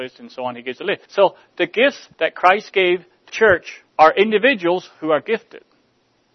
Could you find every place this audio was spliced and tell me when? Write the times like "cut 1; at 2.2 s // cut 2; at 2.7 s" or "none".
cut 1; at 1.0 s // cut 2; at 2.1 s // cut 3; at 3.3 s // cut 4; at 3.9 s